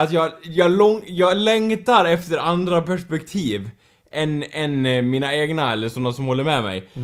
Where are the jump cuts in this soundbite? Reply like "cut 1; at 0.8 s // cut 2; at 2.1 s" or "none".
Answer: none